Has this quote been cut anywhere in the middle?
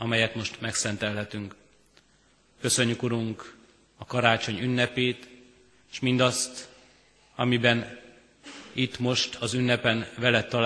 no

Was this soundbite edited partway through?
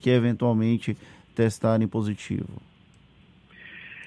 no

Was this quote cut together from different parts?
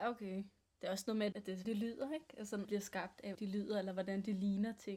yes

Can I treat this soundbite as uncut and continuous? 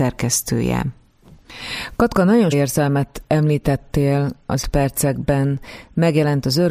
no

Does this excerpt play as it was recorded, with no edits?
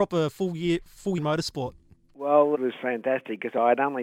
no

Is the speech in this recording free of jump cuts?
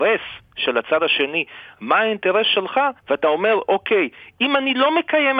no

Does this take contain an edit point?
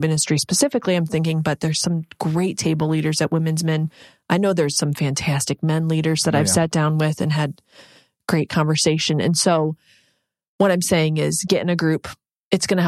no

